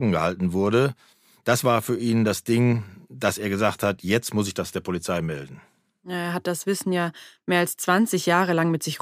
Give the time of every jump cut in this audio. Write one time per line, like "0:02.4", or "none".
none